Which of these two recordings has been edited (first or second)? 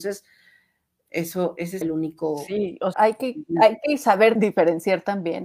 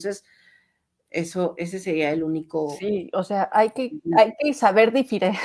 first